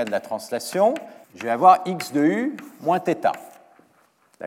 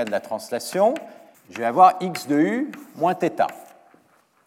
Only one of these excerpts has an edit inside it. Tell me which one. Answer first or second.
first